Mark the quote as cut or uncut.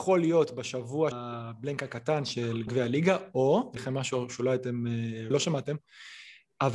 cut